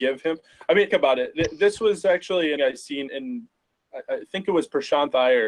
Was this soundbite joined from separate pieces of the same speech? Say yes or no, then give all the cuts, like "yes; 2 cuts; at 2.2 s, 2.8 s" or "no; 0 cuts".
yes; 3 cuts; at 0.9 s, 2.6 s, 3.1 s